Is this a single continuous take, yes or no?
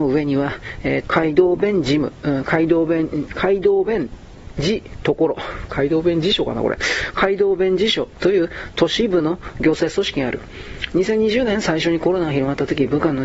no